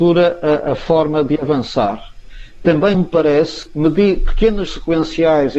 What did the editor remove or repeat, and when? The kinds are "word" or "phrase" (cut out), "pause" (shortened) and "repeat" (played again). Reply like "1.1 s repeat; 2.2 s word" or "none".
2.9 s word; 3.7 s word; 4.7 s word